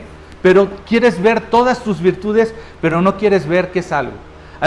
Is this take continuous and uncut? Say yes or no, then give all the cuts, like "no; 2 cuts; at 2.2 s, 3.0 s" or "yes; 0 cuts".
yes; 0 cuts